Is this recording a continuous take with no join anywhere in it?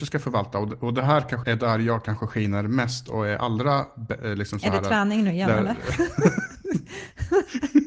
no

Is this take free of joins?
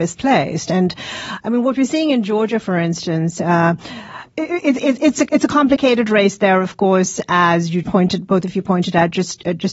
no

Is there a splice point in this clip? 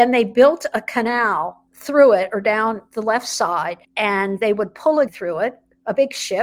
yes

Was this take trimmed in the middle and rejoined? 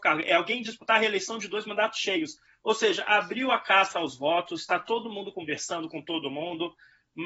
no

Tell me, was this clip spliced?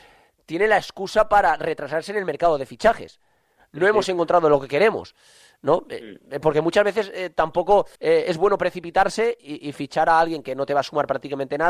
yes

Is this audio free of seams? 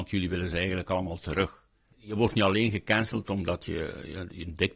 yes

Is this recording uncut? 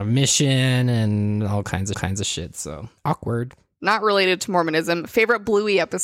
no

